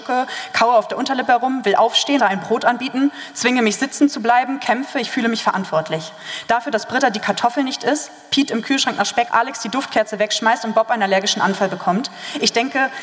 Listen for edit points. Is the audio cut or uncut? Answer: cut